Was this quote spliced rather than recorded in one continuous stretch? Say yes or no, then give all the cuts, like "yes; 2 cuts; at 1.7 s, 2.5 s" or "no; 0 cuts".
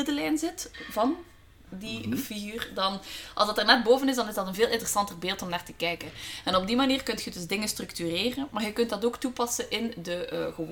no; 0 cuts